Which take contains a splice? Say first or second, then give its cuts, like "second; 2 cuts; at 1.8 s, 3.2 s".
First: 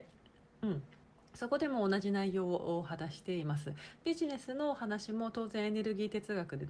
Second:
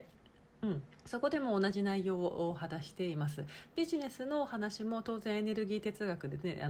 second; 1 cut; at 1.0 s